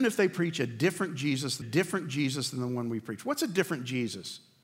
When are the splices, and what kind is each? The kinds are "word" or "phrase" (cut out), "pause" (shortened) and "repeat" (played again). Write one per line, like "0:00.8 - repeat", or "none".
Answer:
0:01.6 - repeat